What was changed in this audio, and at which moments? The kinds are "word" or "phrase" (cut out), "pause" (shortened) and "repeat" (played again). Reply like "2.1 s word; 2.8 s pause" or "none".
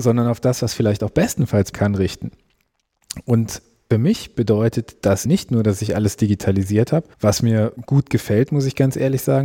1.7 s word; 3.9 s word; 5.3 s word